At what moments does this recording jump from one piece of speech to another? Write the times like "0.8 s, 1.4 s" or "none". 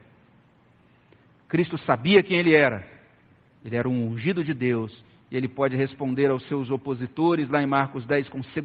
none